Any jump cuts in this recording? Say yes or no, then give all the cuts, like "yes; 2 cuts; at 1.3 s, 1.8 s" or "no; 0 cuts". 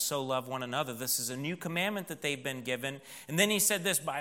no; 0 cuts